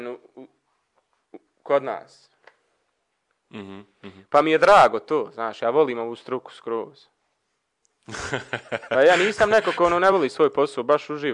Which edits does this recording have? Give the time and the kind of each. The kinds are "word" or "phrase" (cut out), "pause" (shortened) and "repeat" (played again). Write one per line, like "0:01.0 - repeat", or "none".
none